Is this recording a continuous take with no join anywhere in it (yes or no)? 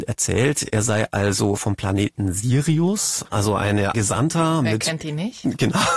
no